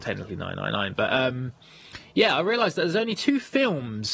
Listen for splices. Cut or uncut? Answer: uncut